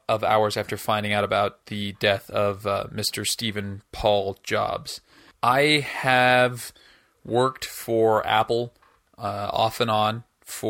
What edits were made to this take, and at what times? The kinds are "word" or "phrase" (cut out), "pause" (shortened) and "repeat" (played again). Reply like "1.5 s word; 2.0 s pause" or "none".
none